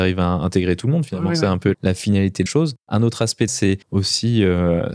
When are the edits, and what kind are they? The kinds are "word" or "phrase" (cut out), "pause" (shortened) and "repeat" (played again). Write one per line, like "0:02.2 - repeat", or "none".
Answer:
0:01.7 - word
0:02.5 - word
0:02.8 - pause
0:03.5 - word
0:03.8 - pause